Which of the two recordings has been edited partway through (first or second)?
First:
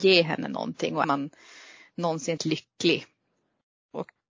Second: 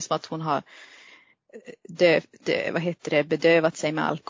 first